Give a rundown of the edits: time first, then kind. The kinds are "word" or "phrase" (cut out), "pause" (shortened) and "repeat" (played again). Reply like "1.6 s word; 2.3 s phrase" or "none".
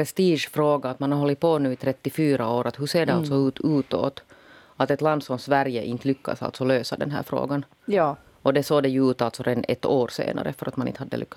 none